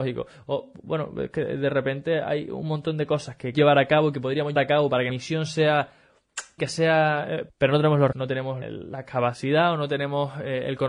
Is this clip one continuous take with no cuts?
no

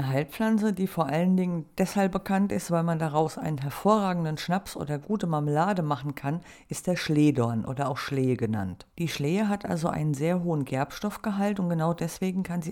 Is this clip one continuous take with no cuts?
no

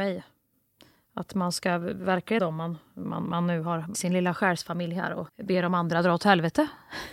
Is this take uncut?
no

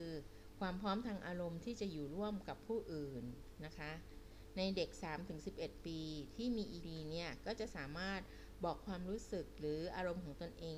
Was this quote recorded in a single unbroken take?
no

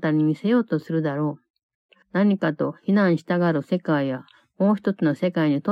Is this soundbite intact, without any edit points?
no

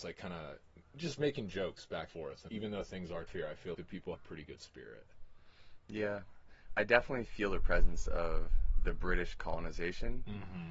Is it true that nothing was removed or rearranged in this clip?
no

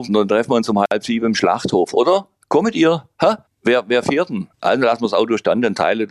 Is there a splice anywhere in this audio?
yes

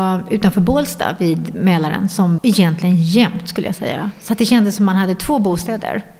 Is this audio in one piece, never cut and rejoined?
no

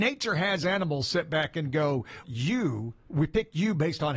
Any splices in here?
yes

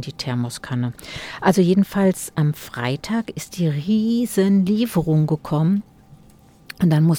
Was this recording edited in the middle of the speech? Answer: no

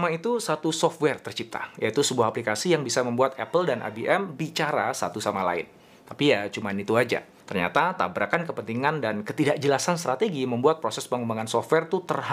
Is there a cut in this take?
no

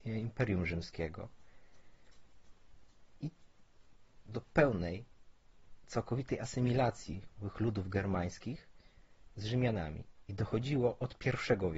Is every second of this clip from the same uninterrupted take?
no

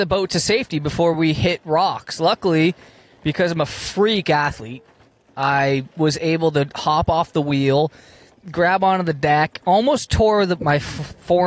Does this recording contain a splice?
no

